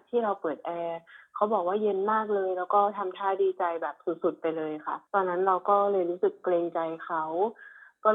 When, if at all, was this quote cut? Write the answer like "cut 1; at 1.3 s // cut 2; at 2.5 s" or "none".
cut 1; at 5.1 s